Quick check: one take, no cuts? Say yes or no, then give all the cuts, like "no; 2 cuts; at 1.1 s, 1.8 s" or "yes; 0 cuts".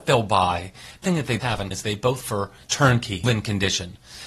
no; 6 cuts; at 1.0 s, 1.4 s, 1.7 s, 2.2 s, 2.6 s, 3.2 s